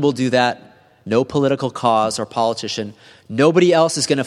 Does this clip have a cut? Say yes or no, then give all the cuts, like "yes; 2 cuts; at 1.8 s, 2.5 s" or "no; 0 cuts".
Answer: no; 0 cuts